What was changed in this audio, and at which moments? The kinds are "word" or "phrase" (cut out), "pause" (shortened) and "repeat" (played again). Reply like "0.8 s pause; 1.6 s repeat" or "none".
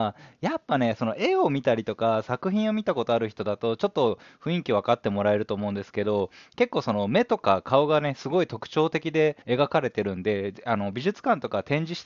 9.4 s pause